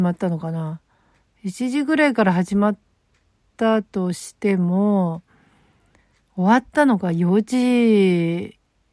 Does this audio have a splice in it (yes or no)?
no